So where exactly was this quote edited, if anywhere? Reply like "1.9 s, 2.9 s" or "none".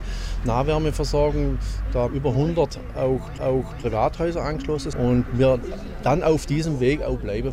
2.1 s, 3.4 s, 4.9 s